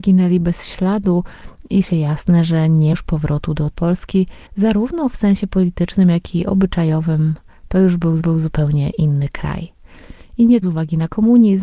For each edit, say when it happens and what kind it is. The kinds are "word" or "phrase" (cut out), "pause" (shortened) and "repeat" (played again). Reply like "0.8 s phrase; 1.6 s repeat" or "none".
1.8 s word; 2.9 s word; 3.7 s word; 4.5 s pause; 8.2 s repeat; 10.6 s phrase